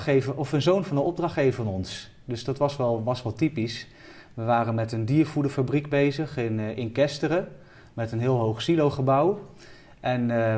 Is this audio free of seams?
yes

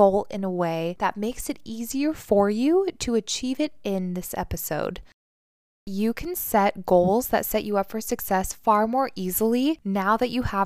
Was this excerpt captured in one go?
yes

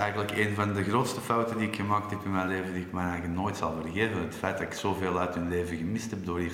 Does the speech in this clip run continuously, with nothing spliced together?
yes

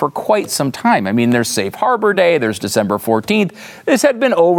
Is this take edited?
no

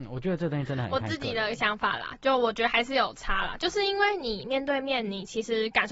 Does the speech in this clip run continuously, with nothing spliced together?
yes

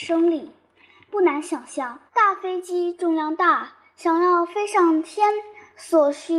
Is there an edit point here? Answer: yes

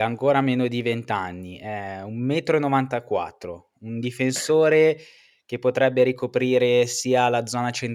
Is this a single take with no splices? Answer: yes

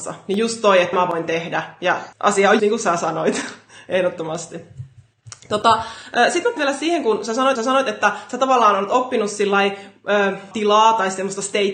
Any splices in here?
yes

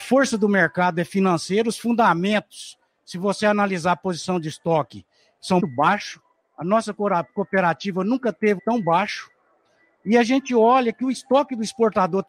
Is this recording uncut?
no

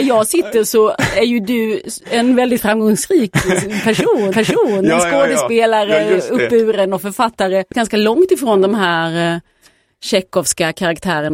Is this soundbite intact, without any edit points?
no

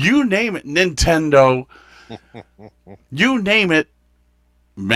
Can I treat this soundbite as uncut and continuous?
yes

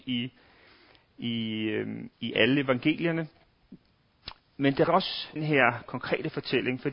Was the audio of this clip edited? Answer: yes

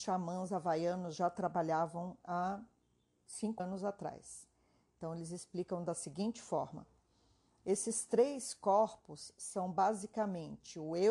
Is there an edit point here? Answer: yes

